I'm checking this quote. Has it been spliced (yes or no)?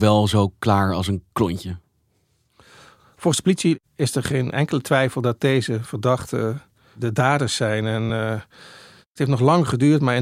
no